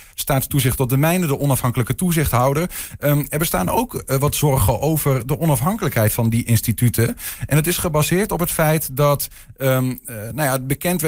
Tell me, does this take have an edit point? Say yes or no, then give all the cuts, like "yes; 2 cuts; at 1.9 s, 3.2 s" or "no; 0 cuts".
no; 0 cuts